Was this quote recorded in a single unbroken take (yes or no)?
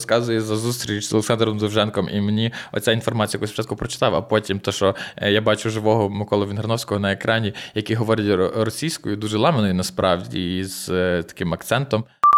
yes